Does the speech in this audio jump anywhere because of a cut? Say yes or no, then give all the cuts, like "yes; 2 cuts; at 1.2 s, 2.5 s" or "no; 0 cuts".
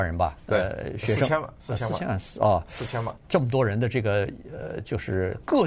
yes; 1 cut; at 3.2 s